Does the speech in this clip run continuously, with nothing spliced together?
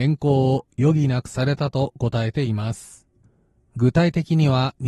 yes; 0 cuts

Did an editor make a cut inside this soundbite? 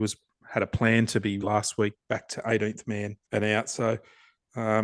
yes; 2 cuts; at 1.4 s, 3.2 s

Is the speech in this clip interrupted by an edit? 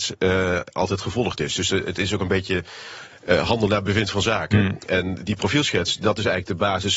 no; 0 cuts

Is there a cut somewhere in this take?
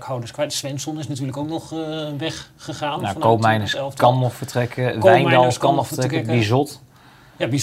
no; 0 cuts

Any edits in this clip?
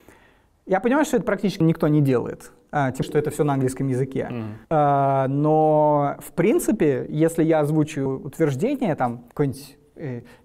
yes; 5 cuts; at 1.6 s, 3.0 s, 4.6 s, 8.1 s, 9.3 s

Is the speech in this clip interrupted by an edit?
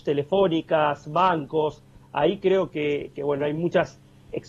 no; 0 cuts

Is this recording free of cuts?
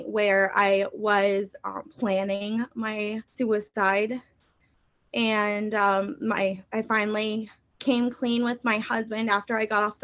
no; 1 cut; at 3.3 s

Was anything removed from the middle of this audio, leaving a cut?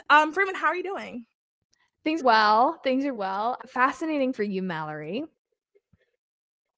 yes; 4 cuts; at 2.2 s, 3.2 s, 3.6 s, 4.3 s

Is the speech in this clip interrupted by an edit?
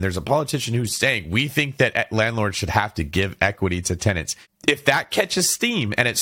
no; 0 cuts

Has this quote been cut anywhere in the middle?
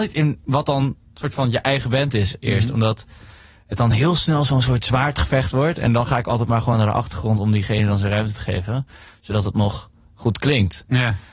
no; 0 cuts

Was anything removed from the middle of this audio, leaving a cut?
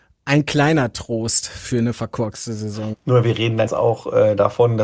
yes; 1 cut; at 3.7 s

